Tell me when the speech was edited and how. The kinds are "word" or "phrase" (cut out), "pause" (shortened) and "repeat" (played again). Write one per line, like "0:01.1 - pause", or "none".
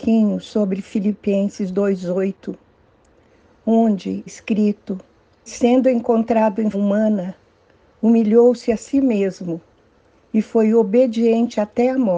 0:04.3 - word
0:05.5 - word
0:06.7 - word